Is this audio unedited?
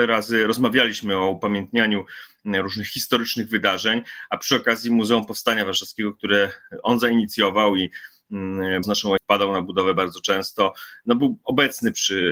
no; 2 cuts; at 8.8 s, 9.2 s

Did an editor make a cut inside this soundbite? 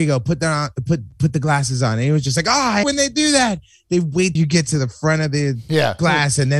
yes; 2 cuts; at 2.8 s, 4.4 s

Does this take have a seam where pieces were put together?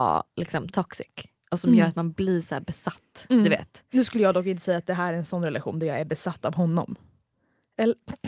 no; 0 cuts

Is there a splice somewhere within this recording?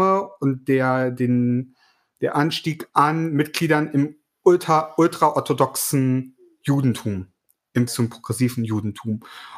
yes; 1 cut; at 7.9 s

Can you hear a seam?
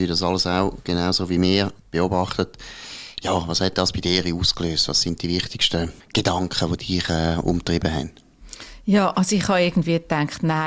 yes; 1 cut; at 6.0 s

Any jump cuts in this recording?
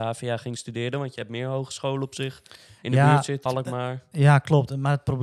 yes; 1 cut; at 3.5 s

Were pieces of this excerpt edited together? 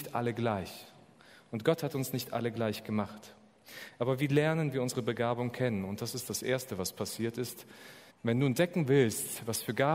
yes; 1 cut; at 8.1 s

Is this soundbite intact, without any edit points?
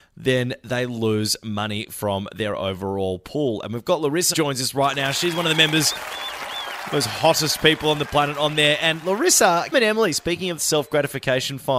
no; 3 cuts; at 4.3 s, 9.7 s, 10.6 s

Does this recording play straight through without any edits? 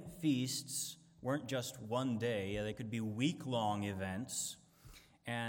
yes; 0 cuts

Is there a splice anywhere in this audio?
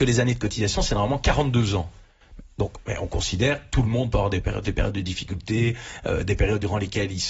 yes; 1 cut; at 4.6 s

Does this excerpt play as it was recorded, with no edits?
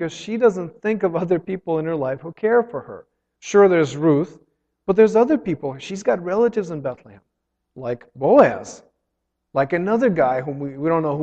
yes; 0 cuts

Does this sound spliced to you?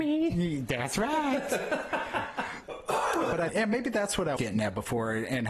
yes; 3 cuts; at 2.6 s, 3.5 s, 4.4 s

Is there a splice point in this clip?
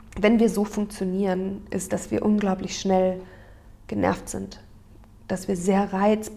no; 0 cuts

